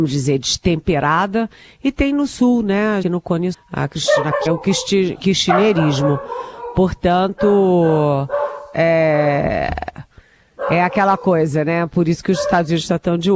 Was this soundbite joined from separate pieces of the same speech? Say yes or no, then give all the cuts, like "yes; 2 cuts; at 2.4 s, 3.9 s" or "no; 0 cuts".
yes; 3 cuts; at 3.0 s, 3.5 s, 4.5 s